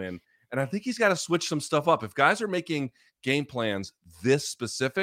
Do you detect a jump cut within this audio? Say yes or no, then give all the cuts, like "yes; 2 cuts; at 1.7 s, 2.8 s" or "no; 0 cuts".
no; 0 cuts